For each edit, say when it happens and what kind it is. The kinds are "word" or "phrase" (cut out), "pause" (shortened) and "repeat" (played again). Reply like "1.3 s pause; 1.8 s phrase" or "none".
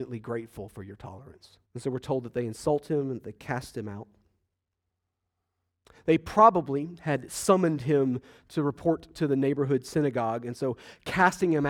1.6 s pause